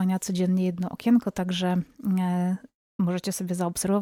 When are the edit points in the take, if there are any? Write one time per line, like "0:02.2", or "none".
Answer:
none